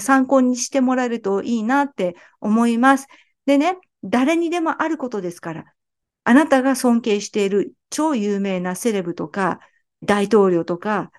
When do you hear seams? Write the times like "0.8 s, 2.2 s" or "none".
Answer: 10.0 s